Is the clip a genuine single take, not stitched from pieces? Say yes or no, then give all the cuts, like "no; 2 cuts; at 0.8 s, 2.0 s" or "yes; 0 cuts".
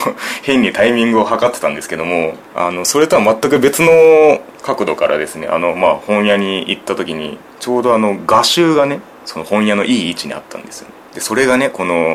no; 1 cut; at 7.5 s